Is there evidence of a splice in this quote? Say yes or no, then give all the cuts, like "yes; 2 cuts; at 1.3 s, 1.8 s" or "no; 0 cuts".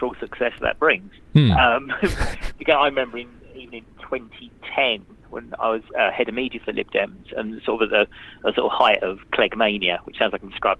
yes; 1 cut; at 5.9 s